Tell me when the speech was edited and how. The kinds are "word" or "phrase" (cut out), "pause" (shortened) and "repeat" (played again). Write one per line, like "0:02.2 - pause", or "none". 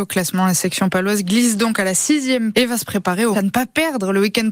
0:02.5 - word
0:03.3 - word